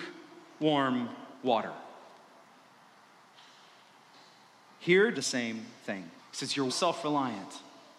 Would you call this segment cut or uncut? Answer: cut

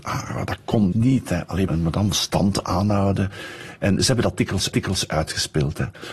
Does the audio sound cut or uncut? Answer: cut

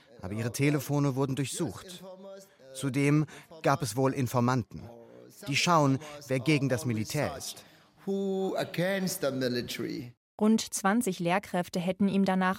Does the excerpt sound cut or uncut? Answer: uncut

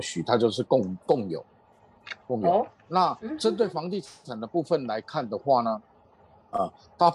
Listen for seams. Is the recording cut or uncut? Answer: uncut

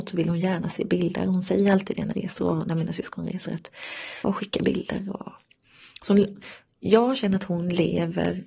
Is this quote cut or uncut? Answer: cut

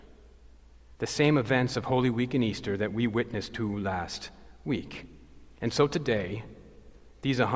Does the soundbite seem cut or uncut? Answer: uncut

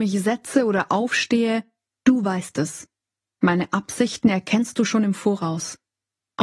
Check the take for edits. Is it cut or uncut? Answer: uncut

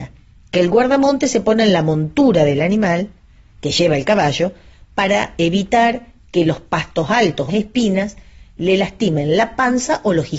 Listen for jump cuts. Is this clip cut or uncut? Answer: cut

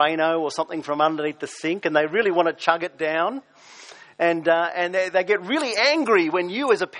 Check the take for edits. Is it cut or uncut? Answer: uncut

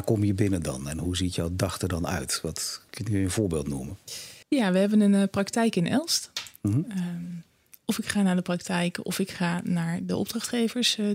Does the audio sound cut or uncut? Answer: cut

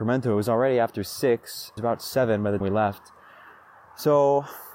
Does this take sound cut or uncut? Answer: cut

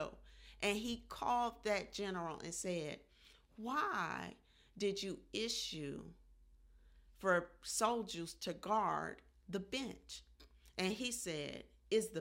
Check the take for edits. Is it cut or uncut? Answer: uncut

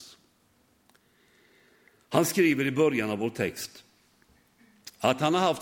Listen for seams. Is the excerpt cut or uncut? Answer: uncut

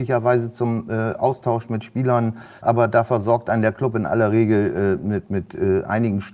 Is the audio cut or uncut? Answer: uncut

